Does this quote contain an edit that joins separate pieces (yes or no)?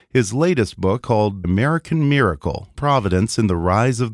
yes